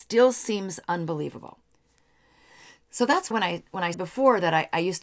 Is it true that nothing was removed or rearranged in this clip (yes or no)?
no